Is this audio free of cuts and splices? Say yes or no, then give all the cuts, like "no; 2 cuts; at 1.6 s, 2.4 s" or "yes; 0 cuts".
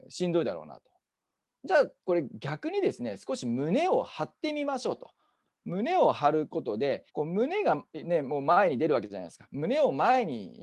no; 1 cut; at 7.1 s